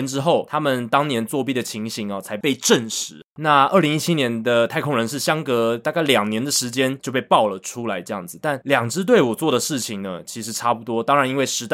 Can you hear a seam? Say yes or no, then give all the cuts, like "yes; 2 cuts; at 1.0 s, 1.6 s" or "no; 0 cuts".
yes; 1 cut; at 3.3 s